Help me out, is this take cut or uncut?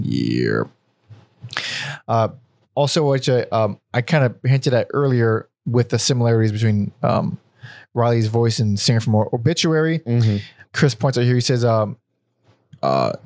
uncut